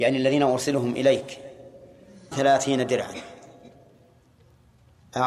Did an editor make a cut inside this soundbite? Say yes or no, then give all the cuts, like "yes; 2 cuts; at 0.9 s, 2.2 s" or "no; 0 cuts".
yes; 1 cut; at 2.3 s